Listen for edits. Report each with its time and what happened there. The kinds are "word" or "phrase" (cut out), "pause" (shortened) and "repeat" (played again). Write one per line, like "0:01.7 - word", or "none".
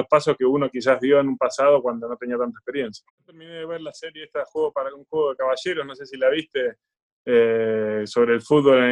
0:03.1 - pause